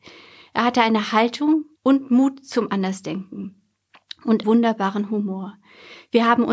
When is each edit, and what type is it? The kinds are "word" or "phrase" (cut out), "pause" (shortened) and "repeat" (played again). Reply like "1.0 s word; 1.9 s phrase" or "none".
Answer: 1.8 s pause; 4.4 s word